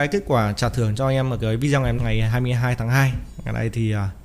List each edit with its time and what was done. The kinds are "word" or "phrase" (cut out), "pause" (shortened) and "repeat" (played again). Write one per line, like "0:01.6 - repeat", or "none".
0:02.0 - word

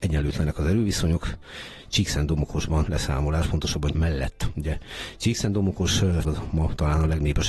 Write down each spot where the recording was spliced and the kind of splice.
0:02.9 - phrase
0:03.9 - word
0:06.2 - word

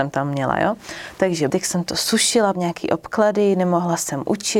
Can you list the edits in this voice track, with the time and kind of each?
0:01.5 - word
0:02.5 - word

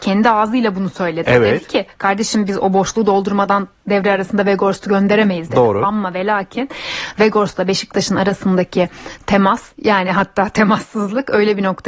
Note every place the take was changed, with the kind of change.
0:09.7 - pause

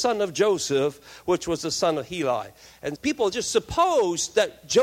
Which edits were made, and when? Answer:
0:03.0 - word

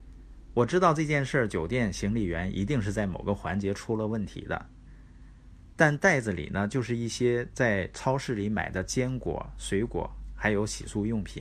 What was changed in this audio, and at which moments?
0:05.7 - pause

